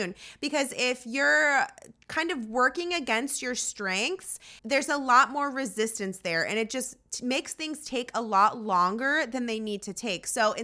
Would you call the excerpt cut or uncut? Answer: cut